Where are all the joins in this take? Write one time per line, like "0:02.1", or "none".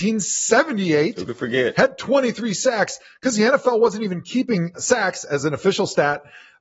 none